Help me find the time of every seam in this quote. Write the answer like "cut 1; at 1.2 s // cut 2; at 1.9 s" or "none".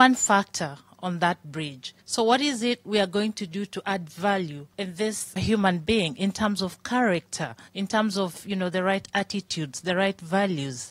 cut 1; at 2.0 s // cut 2; at 4.7 s // cut 3; at 5.4 s // cut 4; at 7.7 s